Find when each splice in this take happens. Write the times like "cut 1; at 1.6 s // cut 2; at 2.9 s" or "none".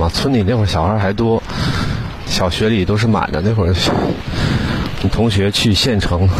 cut 1; at 2.3 s

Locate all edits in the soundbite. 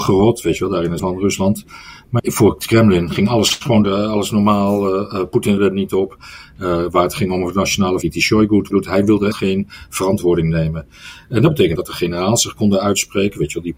cut 1; at 1.0 s // cut 2; at 2.2 s // cut 3; at 3.8 s // cut 4; at 5.6 s // cut 5; at 8.0 s // cut 6; at 8.7 s // cut 7; at 9.3 s // cut 8; at 11.8 s

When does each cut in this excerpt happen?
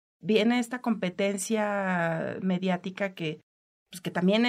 none

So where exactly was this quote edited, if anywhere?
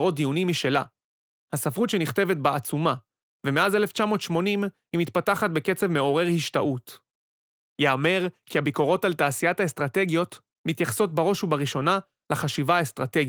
none

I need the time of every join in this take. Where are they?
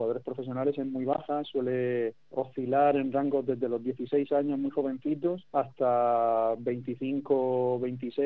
cut 1; at 2.3 s // cut 2; at 5.5 s

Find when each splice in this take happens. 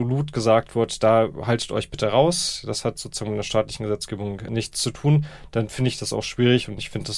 none

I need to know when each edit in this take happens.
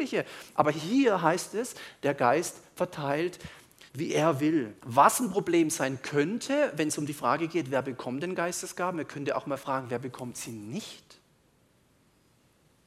cut 1; at 3.9 s // cut 2; at 4.8 s

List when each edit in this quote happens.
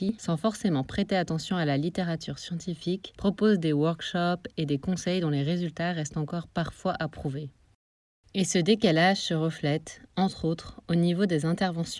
none

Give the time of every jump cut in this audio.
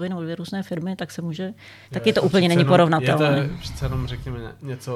cut 1; at 1.8 s

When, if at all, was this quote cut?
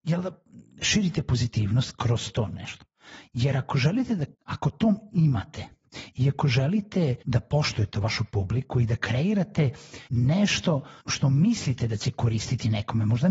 cut 1; at 4.3 s // cut 2; at 7.2 s // cut 3; at 10.1 s // cut 4; at 11.0 s

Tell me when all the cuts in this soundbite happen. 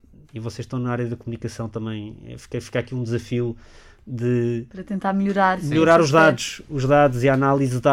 none

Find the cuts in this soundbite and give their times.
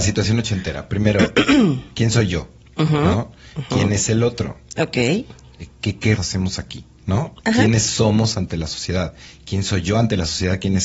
cut 1; at 6.2 s

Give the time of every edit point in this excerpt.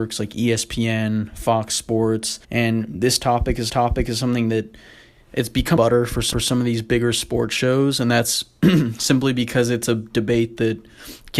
cut 1; at 2.4 s // cut 2; at 3.7 s // cut 3; at 5.8 s // cut 4; at 6.3 s

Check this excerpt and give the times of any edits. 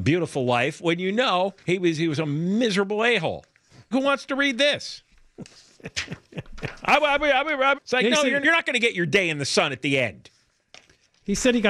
cut 1; at 1.6 s // cut 2; at 3.9 s // cut 3; at 7.7 s // cut 4; at 8.4 s

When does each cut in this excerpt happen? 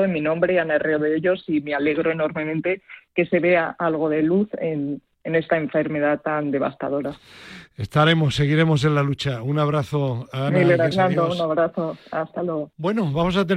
cut 1; at 10.9 s

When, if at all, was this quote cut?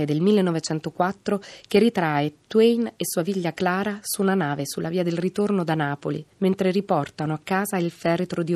cut 1; at 6.3 s

